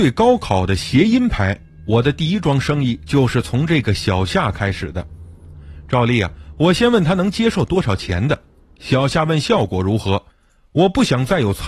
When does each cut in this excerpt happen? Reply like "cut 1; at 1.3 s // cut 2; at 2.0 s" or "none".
none